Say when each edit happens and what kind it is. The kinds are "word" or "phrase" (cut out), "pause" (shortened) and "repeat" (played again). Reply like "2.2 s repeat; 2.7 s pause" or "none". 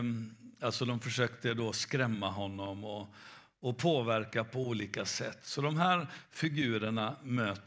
none